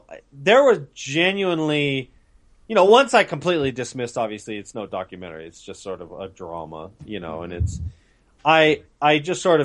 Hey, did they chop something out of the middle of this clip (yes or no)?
no